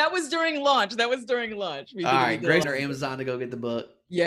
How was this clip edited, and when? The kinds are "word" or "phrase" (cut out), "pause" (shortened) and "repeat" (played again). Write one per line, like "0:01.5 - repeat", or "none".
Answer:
0:02.6 - word